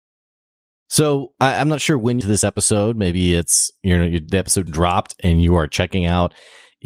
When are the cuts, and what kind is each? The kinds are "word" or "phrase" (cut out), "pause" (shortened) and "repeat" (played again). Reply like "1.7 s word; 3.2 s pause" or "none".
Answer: 2.2 s phrase; 4.7 s word